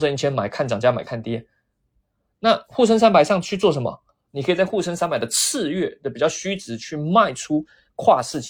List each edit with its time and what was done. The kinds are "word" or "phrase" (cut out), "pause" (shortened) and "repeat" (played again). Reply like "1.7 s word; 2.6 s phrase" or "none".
none

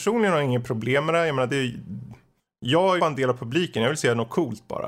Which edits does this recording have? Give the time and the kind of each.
3.0 s word

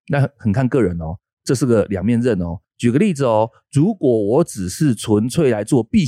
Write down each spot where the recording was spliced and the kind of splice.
2.6 s pause

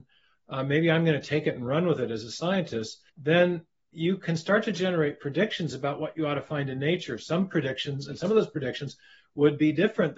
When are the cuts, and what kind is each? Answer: 3.1 s pause

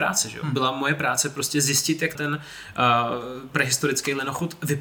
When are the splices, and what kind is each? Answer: 2.1 s word

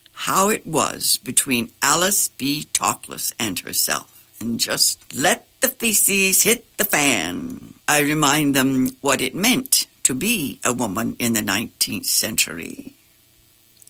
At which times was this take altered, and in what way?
5.1 s pause; 7.8 s pause

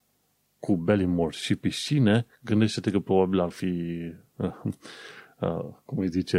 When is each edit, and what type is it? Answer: 3.5 s word

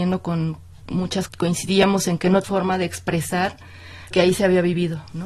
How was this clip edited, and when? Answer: 1.3 s word; 2.4 s word; 4.1 s word

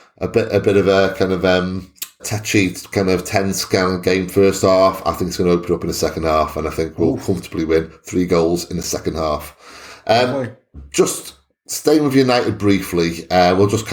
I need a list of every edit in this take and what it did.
2.2 s word

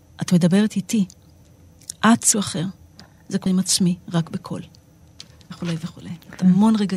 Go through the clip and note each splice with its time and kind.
2.3 s word; 3.5 s word

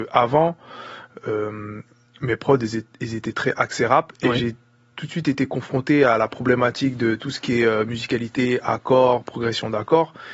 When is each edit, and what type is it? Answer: none

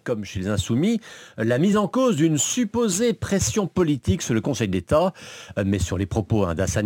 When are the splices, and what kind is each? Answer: none

